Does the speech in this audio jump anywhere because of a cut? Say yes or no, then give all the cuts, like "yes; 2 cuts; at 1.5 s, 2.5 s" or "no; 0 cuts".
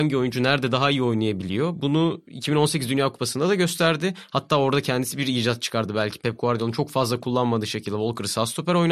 no; 0 cuts